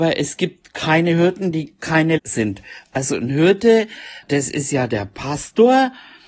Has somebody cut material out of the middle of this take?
yes; 2 cuts; at 2.2 s, 4.2 s

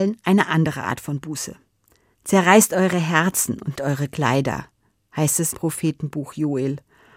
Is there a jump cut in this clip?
yes; 2 cuts; at 3.8 s, 5.5 s

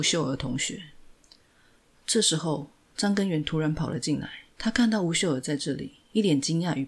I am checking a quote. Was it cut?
yes; 2 cuts; at 1.2 s, 4.5 s

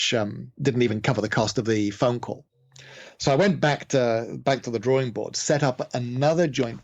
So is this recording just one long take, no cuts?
yes; 0 cuts

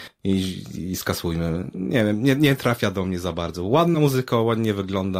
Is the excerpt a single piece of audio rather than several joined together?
yes; 0 cuts

